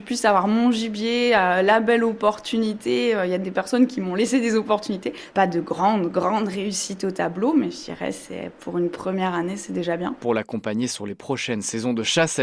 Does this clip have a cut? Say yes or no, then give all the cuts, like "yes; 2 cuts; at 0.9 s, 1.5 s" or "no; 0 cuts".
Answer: no; 0 cuts